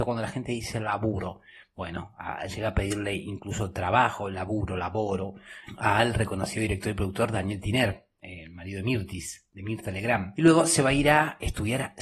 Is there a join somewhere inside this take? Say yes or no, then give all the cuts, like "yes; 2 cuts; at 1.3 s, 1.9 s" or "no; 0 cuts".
no; 0 cuts